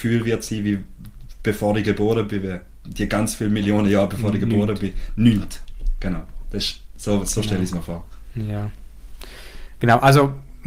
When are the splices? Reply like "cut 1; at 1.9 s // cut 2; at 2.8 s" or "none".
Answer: none